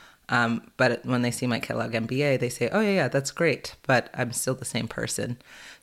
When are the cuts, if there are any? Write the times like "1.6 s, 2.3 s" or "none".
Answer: none